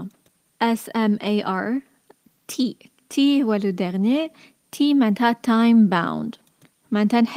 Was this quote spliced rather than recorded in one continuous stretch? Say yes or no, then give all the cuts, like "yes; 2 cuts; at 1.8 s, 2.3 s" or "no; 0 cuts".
no; 0 cuts